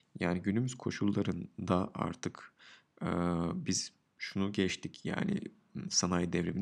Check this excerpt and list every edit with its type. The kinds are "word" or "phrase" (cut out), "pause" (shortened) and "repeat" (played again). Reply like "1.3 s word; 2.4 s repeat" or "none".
none